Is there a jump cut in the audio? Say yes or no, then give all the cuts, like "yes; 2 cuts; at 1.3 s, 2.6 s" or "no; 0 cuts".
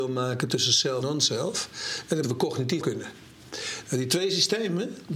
yes; 3 cuts; at 1.0 s, 2.2 s, 2.8 s